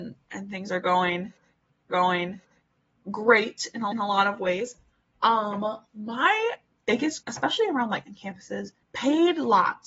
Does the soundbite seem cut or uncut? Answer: cut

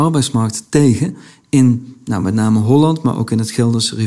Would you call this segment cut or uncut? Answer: uncut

